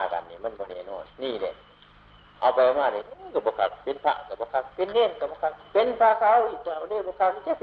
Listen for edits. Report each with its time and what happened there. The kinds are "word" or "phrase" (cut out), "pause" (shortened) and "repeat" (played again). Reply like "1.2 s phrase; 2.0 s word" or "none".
1.1 s pause